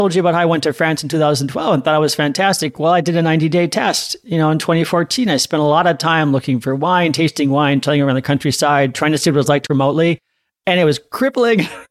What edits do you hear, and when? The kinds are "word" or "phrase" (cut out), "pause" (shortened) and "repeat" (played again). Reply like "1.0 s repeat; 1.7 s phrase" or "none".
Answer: 9.7 s word